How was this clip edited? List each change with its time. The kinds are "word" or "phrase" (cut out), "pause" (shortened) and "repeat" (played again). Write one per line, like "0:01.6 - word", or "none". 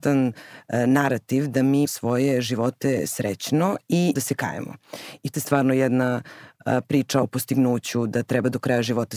0:01.8 - phrase
0:04.1 - phrase
0:05.3 - word
0:07.2 - phrase